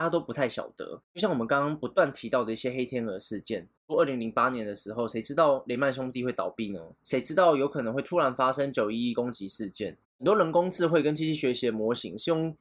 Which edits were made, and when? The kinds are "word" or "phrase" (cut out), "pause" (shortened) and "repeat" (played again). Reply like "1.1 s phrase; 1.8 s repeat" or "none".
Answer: 6.9 s pause